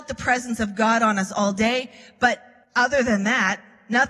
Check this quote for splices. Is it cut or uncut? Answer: cut